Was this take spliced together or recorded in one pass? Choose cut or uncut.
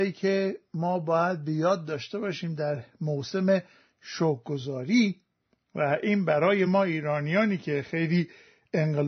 uncut